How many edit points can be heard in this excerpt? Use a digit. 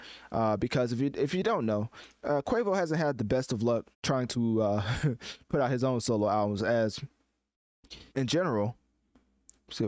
2